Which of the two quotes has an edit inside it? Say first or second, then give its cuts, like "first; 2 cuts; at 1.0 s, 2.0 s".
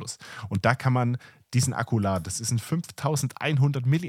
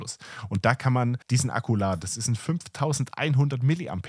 second; 1 cut; at 1.2 s